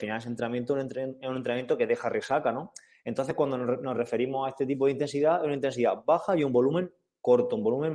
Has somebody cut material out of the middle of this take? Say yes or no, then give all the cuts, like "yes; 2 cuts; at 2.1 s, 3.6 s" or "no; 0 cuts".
no; 0 cuts